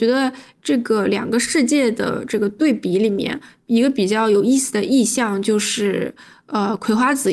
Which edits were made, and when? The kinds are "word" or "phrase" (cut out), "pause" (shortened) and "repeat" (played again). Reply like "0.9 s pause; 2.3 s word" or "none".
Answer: none

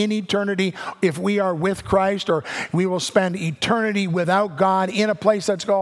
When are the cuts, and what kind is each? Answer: none

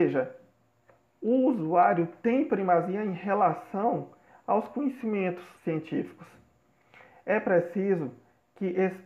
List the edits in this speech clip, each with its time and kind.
5.5 s pause

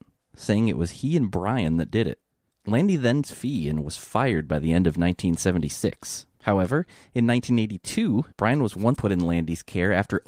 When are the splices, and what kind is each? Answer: 2.3 s pause; 3.2 s phrase; 6.3 s pause; 8.3 s pause; 9.0 s word

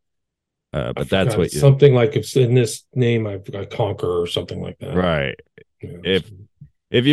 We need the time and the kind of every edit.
none

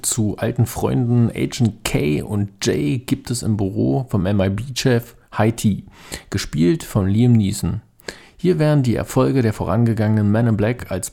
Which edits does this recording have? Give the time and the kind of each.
none

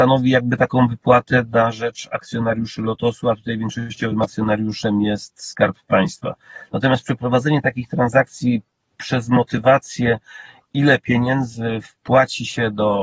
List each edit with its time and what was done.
none

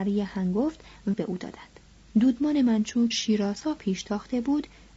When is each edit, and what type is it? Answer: 1.1 s word; 2.1 s word; 3.1 s word

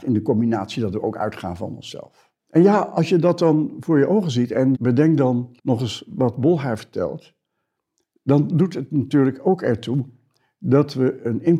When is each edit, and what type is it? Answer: 2.4 s pause; 4.7 s word; 5.6 s pause

